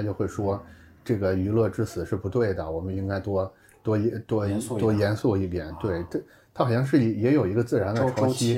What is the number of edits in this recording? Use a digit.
0